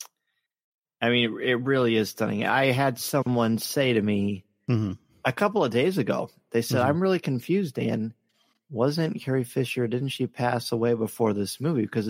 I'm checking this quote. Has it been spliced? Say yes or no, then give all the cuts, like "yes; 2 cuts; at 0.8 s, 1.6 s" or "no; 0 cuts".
no; 0 cuts